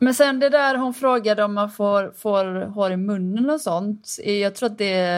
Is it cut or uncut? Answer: uncut